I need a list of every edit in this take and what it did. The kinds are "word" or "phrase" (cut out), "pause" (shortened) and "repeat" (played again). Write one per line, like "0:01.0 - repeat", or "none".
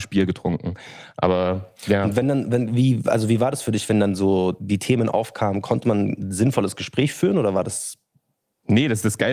0:01.8 - pause